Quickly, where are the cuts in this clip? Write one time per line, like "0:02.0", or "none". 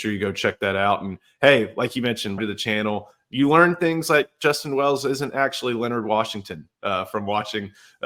0:02.4